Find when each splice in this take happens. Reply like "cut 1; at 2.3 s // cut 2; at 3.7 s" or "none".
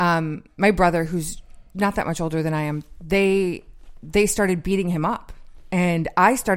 none